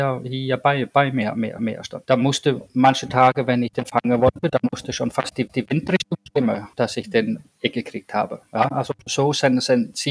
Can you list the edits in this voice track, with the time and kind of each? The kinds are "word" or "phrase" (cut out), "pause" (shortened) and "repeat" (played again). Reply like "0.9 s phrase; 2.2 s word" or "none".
1.6 s repeat; 5.5 s repeat; 6.7 s pause; 9.1 s word